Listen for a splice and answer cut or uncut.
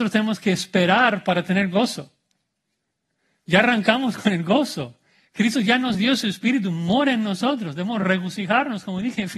uncut